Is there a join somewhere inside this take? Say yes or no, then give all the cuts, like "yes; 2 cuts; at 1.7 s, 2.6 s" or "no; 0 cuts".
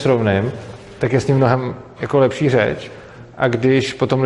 no; 0 cuts